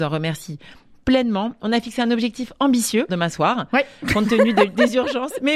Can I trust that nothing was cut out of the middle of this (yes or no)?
no